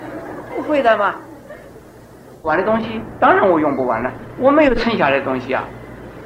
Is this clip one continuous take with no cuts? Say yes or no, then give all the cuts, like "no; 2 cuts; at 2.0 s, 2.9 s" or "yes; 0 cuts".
no; 1 cut; at 4.4 s